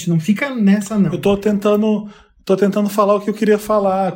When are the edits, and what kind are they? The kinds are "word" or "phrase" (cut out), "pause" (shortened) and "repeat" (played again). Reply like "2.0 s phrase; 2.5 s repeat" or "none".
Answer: none